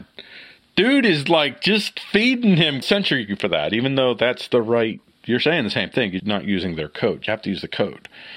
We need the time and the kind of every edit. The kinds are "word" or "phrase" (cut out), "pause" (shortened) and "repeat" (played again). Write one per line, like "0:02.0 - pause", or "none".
0:02.8 - phrase
0:06.2 - word